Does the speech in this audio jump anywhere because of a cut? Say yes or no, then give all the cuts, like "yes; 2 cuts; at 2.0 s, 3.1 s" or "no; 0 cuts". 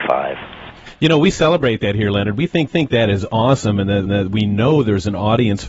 yes; 2 cuts; at 2.7 s, 4.1 s